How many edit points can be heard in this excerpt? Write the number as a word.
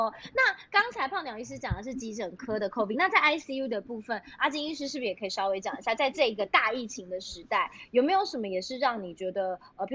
one